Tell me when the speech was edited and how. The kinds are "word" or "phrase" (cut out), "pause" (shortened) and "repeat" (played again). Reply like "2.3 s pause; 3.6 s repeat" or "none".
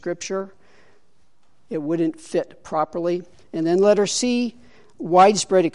none